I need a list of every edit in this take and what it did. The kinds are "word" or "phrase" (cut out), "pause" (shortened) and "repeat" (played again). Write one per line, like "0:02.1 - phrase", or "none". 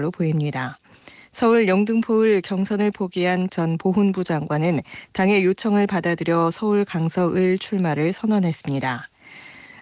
0:03.5 - word